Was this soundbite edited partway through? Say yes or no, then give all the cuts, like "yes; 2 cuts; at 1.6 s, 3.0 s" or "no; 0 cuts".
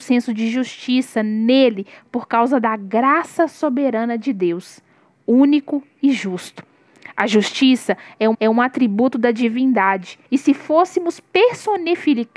yes; 2 cuts; at 8.3 s, 10.2 s